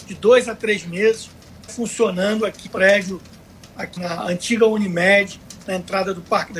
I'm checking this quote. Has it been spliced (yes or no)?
yes